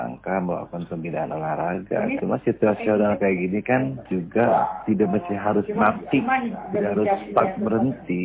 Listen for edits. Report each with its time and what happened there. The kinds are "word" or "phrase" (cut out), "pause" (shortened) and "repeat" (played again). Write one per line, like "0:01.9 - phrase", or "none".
none